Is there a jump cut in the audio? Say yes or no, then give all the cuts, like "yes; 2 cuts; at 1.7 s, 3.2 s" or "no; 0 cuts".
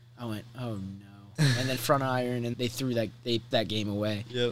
yes; 3 cuts; at 1.8 s, 2.5 s, 3.5 s